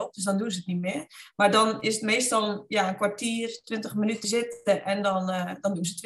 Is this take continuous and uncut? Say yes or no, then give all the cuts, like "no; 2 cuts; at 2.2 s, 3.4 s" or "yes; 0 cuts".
no; 1 cut; at 4.2 s